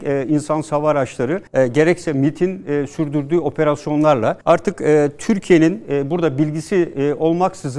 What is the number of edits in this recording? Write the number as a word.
two